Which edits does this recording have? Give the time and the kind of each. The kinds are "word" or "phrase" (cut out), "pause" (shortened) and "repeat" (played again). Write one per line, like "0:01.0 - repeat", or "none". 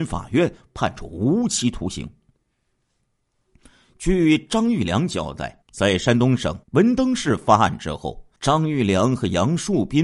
0:05.6 - pause
0:06.6 - pause
0:08.4 - pause